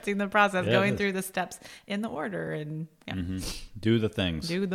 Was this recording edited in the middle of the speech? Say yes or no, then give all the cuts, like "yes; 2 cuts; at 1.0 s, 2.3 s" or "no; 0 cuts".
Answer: no; 0 cuts